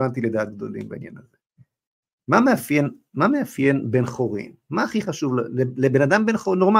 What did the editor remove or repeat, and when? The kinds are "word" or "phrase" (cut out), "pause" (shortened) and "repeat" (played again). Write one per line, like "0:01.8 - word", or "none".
none